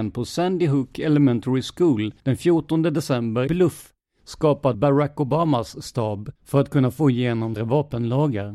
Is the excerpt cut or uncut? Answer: cut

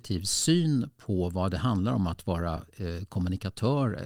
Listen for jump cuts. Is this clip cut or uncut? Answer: uncut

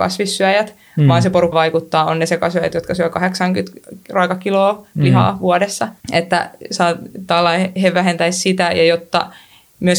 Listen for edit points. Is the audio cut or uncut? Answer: cut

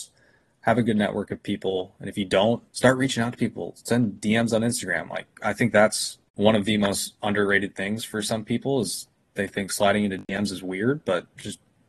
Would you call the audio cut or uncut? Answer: cut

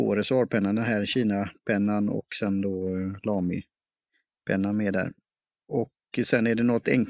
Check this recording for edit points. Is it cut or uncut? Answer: uncut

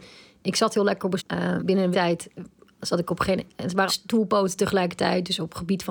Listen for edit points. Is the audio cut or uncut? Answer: cut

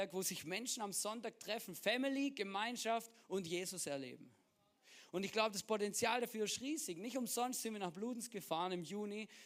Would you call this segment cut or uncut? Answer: uncut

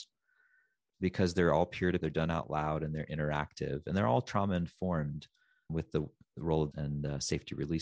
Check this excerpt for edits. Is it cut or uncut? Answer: cut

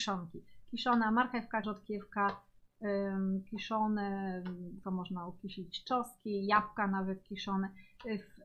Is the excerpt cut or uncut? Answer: cut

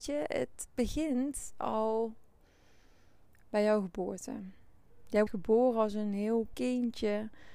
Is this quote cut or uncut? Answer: cut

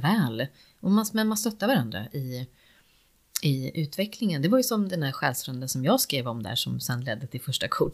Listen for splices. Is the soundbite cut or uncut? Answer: uncut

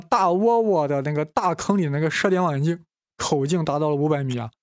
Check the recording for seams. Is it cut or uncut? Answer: uncut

